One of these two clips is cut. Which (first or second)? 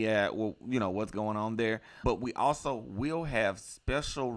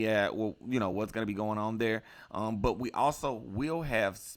first